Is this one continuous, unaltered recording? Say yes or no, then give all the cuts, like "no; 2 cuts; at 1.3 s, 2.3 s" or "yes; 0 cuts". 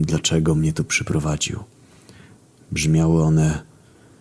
yes; 0 cuts